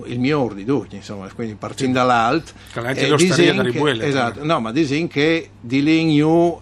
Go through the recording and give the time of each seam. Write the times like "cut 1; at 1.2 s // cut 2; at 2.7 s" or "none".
none